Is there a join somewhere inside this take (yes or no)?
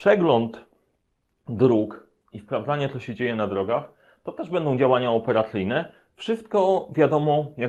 no